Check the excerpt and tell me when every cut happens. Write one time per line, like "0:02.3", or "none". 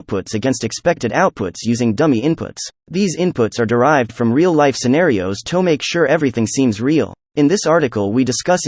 0:02.8
0:07.2